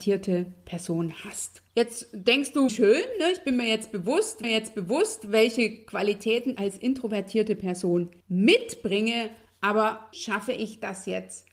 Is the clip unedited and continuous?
no; 6 cuts; at 1.7 s, 2.7 s, 4.4 s, 6.5 s, 8.2 s, 10.1 s

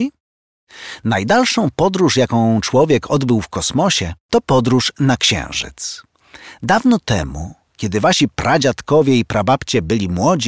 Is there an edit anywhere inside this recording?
no; 0 cuts

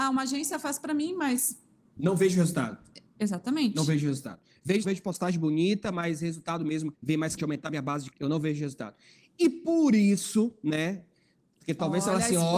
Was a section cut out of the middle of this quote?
yes; 4 cuts; at 4.8 s, 6.9 s, 7.4 s, 8.1 s

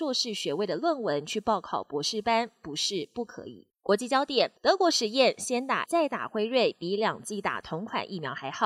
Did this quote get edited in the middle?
yes; 3 cuts; at 3.7 s, 4.6 s, 5.9 s

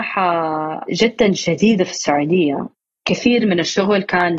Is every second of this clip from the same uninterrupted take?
yes; 0 cuts

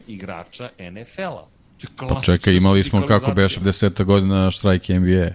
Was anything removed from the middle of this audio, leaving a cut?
yes; 1 cut; at 3.6 s

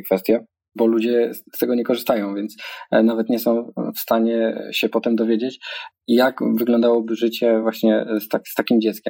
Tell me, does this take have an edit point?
no; 0 cuts

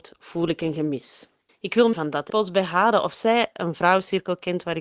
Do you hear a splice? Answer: yes; 3 cuts; at 1.5 s, 1.9 s, 2.3 s

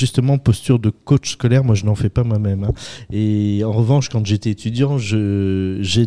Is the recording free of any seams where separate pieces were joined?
yes; 0 cuts

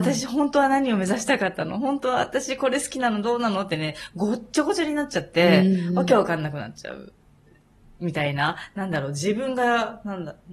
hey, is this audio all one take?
yes; 0 cuts

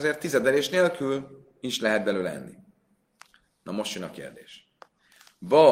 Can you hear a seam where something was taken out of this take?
no; 0 cuts

